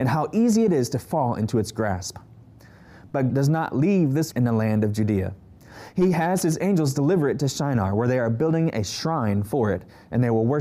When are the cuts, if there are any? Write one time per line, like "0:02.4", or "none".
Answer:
0:03.3
0:04.3